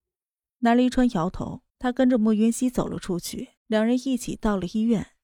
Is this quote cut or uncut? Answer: cut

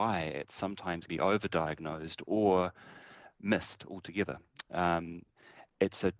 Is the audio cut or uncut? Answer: cut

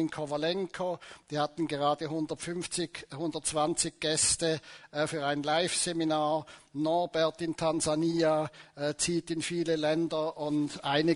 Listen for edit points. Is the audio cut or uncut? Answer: uncut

